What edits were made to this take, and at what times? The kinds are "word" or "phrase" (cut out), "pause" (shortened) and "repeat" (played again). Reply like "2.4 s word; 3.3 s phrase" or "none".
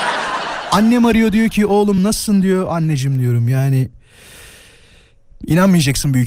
none